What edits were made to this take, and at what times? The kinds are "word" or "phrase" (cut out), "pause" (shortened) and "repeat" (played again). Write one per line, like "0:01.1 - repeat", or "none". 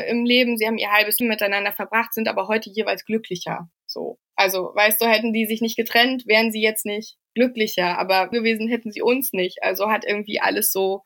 0:01.2 - word
0:03.7 - pause
0:07.2 - pause
0:08.3 - phrase